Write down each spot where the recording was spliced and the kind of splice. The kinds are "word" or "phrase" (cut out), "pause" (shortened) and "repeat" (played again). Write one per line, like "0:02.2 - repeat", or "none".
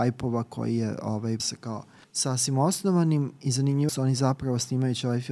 0:01.4 - word
0:02.0 - pause
0:03.9 - phrase

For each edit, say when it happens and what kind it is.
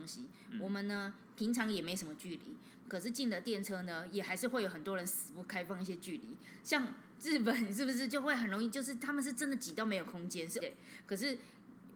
0:10.6 - word

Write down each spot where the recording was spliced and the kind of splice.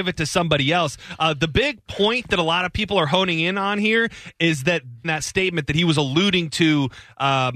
0:05.0 - phrase

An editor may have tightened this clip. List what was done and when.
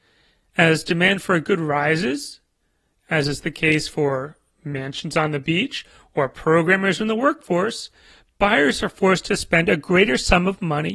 none

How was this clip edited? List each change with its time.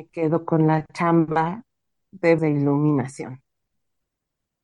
0:02.4 - word

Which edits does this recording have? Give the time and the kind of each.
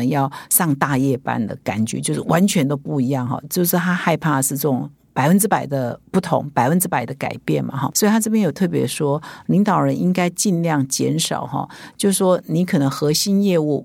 0:06.0 - pause

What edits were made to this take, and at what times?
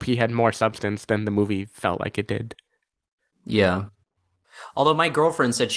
none

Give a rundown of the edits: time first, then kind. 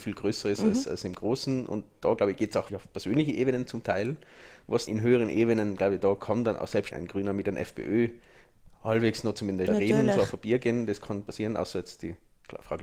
0:02.7 - word
0:04.9 - word
0:06.9 - word
0:09.7 - word

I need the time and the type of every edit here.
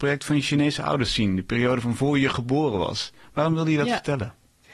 none

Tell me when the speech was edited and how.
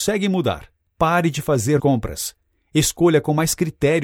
0:01.8 - word

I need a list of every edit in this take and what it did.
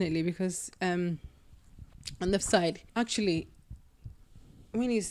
0:02.4 - word
0:02.9 - pause

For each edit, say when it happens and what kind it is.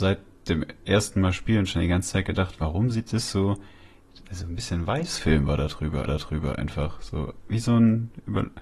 0:06.1 - repeat

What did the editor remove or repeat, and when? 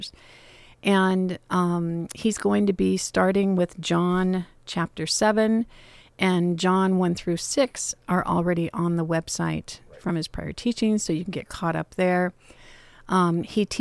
none

